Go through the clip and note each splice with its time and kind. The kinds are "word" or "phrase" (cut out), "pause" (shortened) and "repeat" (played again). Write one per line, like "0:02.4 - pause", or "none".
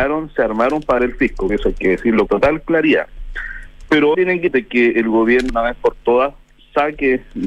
0:01.0 - word
0:01.5 - word
0:02.3 - word
0:04.1 - word
0:04.5 - word
0:05.5 - word